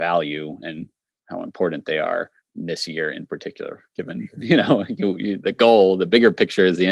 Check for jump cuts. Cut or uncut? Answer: uncut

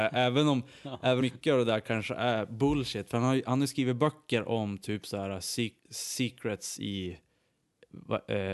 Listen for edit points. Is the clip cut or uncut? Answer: cut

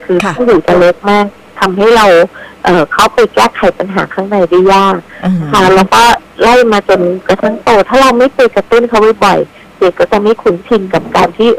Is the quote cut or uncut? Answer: uncut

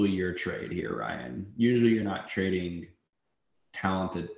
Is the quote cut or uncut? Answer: uncut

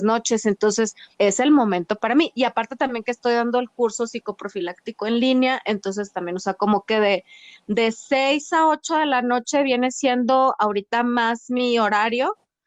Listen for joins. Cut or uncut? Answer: cut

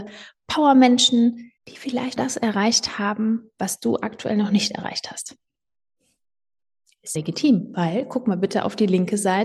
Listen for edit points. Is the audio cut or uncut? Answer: cut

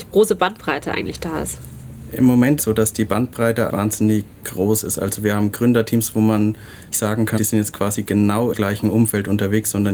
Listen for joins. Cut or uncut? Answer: cut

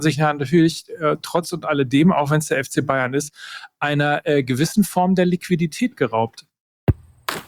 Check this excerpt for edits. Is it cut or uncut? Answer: uncut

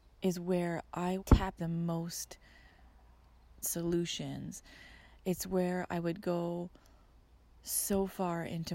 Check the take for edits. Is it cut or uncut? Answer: cut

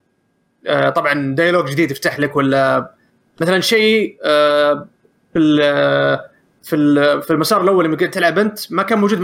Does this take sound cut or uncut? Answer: uncut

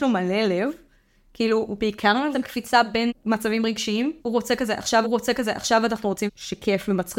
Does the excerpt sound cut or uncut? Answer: cut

